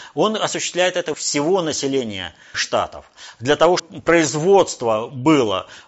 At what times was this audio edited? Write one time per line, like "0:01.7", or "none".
0:01.1
0:02.5
0:03.8